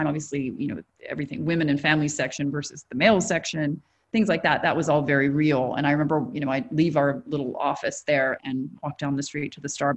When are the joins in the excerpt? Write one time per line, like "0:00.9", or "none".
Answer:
none